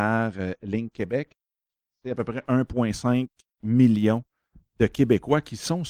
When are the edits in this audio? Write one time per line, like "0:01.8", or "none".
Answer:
none